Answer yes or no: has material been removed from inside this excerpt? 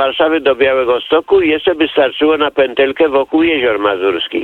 no